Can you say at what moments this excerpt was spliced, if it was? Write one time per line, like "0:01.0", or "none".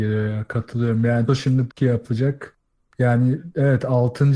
0:01.3
0:01.7